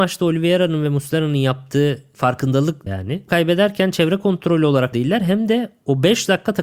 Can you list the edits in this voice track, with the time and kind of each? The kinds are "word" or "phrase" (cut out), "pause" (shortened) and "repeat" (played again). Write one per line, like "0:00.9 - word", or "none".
0:02.9 - word
0:03.3 - phrase
0:04.9 - word